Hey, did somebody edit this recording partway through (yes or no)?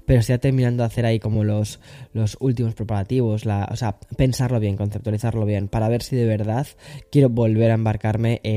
no